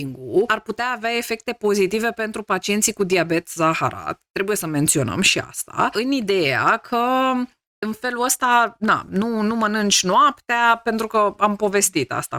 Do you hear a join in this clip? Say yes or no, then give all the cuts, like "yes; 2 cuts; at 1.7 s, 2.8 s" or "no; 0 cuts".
no; 0 cuts